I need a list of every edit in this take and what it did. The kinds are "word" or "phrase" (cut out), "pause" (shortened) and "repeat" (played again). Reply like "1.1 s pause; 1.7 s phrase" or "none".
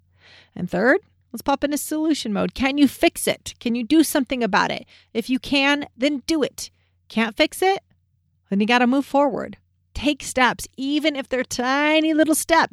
9.8 s pause